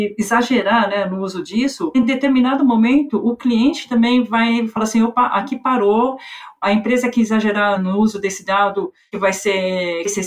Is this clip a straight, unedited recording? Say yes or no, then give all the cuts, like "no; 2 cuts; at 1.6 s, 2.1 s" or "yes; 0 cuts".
yes; 0 cuts